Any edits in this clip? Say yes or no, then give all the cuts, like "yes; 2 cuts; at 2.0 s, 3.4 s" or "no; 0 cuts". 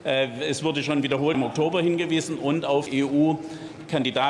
yes; 2 cuts; at 1.3 s, 2.9 s